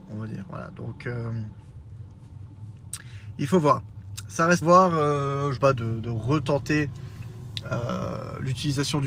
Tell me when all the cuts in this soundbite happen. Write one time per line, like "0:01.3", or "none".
0:04.6
0:05.6